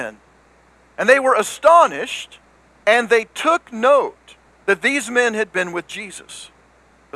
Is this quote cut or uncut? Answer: uncut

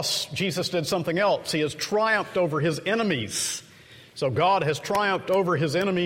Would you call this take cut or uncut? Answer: uncut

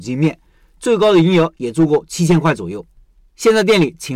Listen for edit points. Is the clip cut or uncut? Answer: uncut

